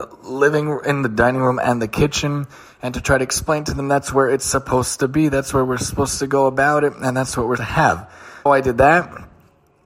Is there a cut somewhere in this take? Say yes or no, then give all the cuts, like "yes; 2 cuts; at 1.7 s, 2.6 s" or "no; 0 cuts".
yes; 2 cuts; at 7.6 s, 8.5 s